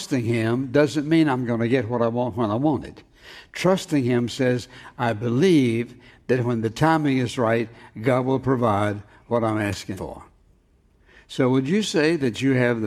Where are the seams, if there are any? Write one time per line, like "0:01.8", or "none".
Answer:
0:10.0